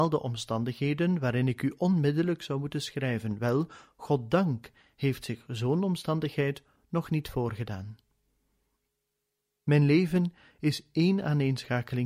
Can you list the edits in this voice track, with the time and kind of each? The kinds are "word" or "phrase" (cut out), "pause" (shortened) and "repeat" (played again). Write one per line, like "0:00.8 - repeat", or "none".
none